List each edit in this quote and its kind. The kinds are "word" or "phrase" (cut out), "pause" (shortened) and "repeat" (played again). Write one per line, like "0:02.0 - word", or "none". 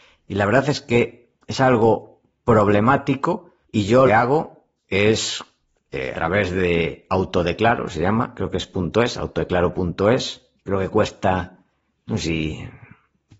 0:01.4 - pause
0:03.6 - pause
0:04.1 - phrase
0:04.8 - pause
0:06.1 - word
0:10.6 - pause